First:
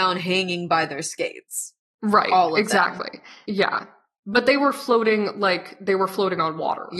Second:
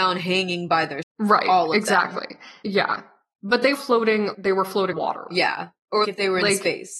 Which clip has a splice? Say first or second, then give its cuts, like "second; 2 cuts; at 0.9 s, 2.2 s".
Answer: second; 5 cuts; at 1.0 s, 3.7 s, 4.3 s, 4.9 s, 6.0 s